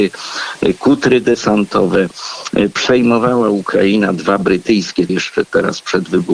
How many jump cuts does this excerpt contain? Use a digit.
1